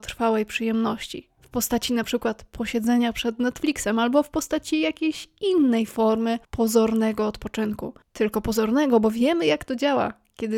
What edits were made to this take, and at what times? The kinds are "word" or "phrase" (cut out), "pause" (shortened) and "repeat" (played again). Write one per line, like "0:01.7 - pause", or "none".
0:06.4 - pause
0:08.0 - pause